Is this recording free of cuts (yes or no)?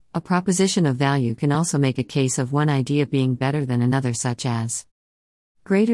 yes